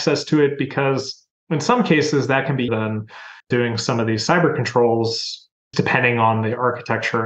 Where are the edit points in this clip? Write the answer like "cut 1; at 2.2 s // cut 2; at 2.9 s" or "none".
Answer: cut 1; at 2.7 s // cut 2; at 3.4 s // cut 3; at 5.7 s